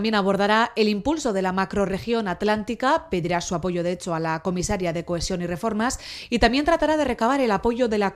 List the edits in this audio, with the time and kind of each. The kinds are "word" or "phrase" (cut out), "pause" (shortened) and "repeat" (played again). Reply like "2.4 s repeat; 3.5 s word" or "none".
none

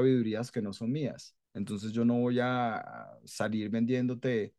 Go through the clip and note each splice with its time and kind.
1.4 s pause

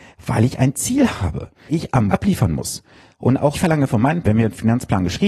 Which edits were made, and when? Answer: 1.7 s word; 2.1 s word; 3.5 s word; 4.2 s word

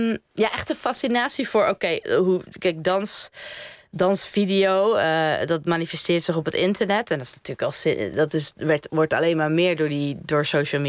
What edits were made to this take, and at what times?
none

